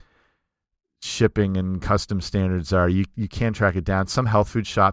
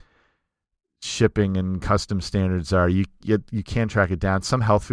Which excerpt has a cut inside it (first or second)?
first